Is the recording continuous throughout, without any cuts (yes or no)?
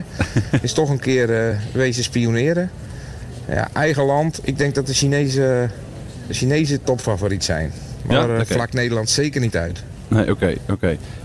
yes